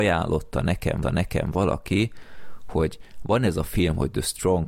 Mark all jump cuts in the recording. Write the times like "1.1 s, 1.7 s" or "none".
1.0 s